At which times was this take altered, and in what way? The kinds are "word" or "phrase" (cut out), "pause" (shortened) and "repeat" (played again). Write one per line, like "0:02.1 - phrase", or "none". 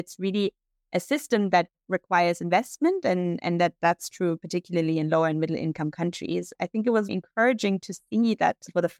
0:07.1 - word